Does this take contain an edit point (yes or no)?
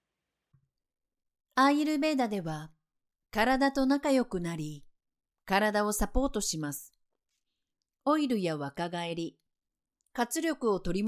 no